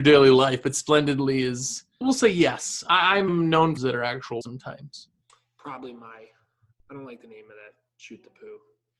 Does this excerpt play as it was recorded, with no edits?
no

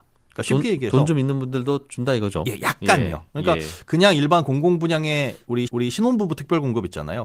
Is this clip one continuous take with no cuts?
no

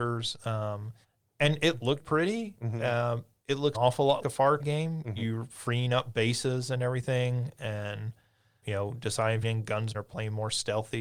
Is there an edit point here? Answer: yes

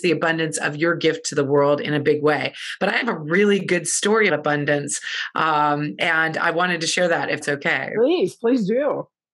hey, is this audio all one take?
no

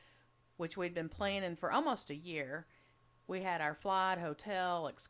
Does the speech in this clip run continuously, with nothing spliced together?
yes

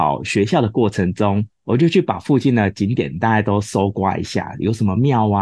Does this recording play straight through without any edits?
no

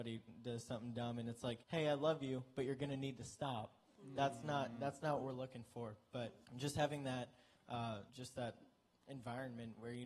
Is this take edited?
yes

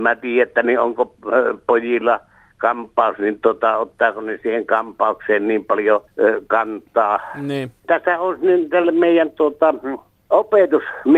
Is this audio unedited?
yes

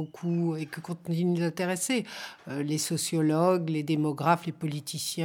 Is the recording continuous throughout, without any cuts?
yes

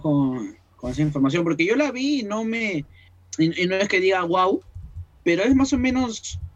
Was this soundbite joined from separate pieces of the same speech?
no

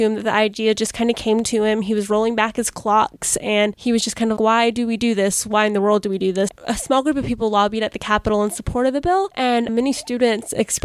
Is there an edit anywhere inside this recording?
yes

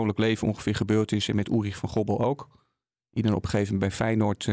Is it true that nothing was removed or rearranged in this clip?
yes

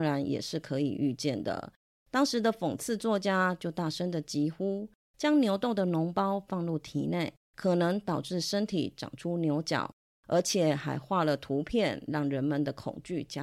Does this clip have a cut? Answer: no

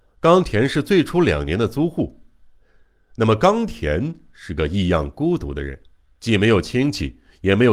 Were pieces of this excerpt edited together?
no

